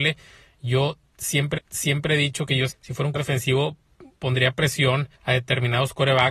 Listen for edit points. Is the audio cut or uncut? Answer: cut